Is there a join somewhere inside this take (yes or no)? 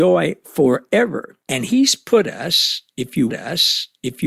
yes